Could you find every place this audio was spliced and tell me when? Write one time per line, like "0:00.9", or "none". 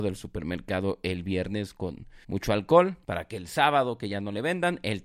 0:02.2
0:03.0